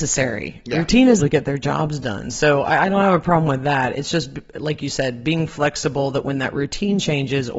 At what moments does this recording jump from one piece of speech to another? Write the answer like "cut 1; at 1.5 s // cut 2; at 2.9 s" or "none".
cut 1; at 1.2 s

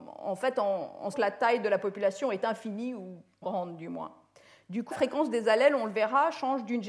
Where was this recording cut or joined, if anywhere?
cut 1; at 1.1 s // cut 2; at 3.4 s // cut 3; at 4.9 s

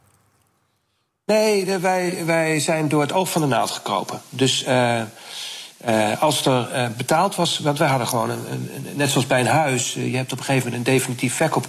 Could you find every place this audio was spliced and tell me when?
none

